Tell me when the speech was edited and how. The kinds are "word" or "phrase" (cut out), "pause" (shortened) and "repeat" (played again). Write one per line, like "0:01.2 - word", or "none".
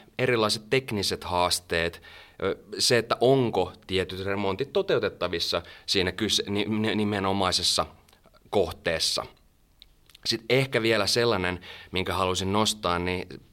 none